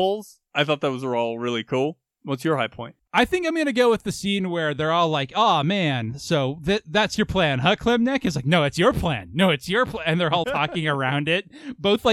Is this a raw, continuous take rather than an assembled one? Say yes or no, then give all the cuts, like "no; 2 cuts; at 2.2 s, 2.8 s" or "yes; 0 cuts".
no; 1 cut; at 10.4 s